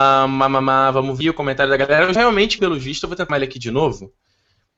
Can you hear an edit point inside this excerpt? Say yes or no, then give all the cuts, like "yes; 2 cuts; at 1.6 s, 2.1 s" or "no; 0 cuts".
yes; 4 cuts; at 1.2 s, 2.2 s, 2.6 s, 3.3 s